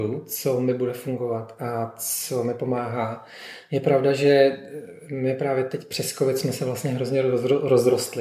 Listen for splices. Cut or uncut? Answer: uncut